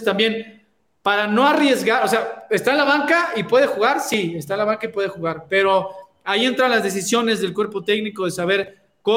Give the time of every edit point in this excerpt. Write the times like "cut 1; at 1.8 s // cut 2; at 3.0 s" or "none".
none